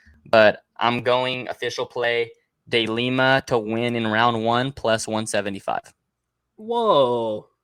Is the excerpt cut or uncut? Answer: uncut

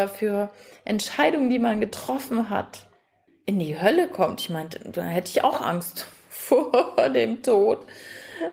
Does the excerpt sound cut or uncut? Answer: cut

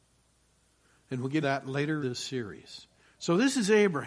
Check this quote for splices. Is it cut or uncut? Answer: cut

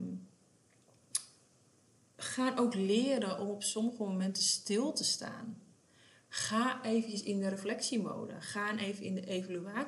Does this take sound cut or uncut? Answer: uncut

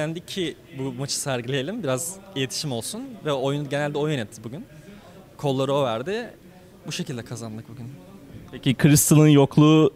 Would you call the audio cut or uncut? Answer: uncut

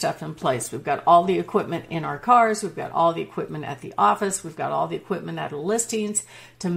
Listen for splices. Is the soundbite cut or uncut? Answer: uncut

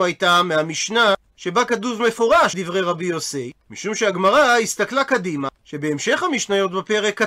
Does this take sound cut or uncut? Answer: cut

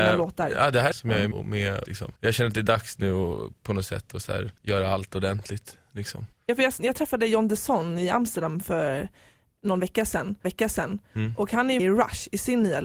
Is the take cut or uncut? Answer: cut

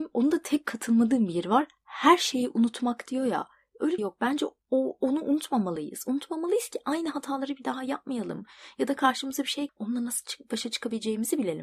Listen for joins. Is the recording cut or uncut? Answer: cut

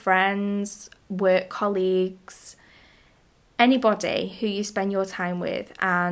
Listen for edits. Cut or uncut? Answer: uncut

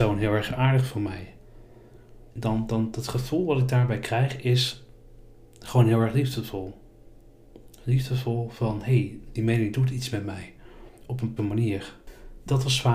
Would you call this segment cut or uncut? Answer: cut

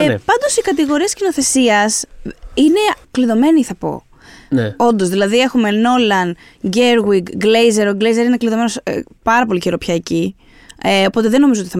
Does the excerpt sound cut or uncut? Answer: cut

